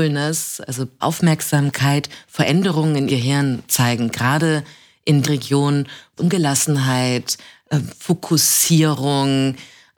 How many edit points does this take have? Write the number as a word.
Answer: four